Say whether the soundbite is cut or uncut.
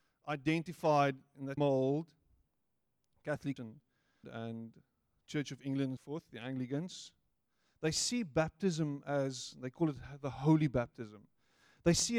cut